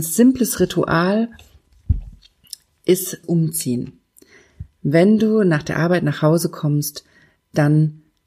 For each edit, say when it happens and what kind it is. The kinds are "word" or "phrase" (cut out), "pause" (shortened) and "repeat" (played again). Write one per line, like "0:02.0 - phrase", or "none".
0:03.2 - word